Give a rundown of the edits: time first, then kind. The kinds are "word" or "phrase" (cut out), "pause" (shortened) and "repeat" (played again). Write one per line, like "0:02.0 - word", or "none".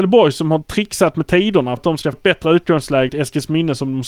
0:01.8 - word
0:02.1 - word
0:03.1 - word